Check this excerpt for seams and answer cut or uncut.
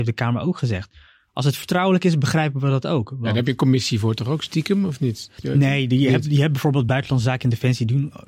uncut